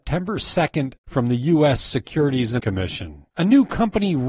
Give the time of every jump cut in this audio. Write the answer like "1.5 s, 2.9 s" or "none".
1.0 s, 2.6 s, 3.3 s